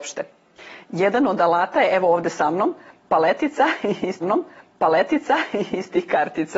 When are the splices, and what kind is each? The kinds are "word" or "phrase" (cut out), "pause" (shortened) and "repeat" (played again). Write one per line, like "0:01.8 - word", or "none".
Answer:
0:04.2 - repeat